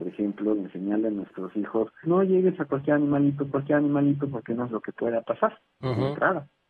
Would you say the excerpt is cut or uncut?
cut